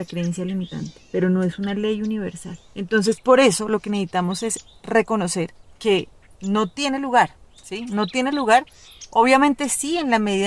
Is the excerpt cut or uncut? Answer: uncut